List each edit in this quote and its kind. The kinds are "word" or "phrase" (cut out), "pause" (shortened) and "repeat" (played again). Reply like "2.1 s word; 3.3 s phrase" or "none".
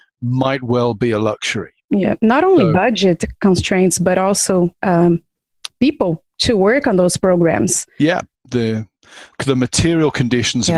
1.8 s pause